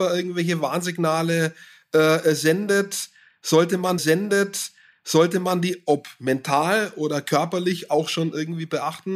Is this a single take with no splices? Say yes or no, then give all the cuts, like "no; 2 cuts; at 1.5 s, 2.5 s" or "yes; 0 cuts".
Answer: no; 1 cut; at 4.0 s